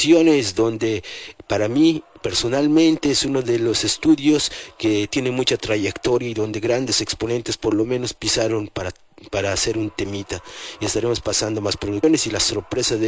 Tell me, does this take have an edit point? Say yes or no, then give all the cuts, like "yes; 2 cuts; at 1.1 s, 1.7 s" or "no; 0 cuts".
no; 0 cuts